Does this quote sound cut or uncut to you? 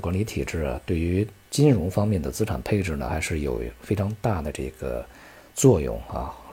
uncut